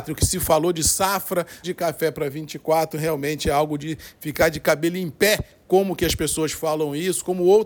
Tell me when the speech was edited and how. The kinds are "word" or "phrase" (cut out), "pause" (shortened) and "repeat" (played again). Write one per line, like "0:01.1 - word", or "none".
0:01.6 - phrase